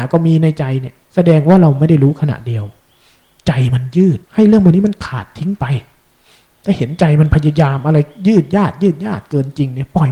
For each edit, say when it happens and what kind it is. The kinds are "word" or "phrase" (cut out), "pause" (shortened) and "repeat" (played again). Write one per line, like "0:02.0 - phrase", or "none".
0:01.0 - pause
0:04.2 - pause